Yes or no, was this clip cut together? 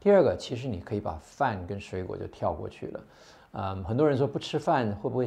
no